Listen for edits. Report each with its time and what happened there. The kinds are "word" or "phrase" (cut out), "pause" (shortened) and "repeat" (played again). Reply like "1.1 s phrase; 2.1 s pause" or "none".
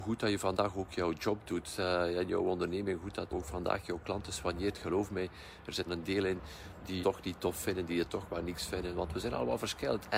3.3 s word; 5.9 s word; 7.0 s word